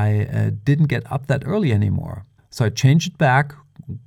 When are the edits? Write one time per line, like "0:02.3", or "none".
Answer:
0:02.4